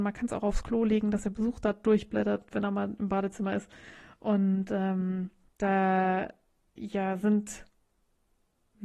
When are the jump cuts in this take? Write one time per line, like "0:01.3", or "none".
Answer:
0:05.5